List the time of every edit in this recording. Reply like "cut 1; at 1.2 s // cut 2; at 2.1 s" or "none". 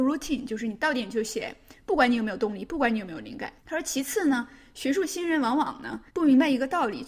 cut 1; at 3.6 s // cut 2; at 6.1 s